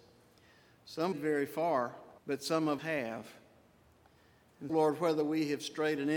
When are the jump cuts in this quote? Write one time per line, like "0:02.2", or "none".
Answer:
0:01.1
0:02.2
0:02.8
0:04.7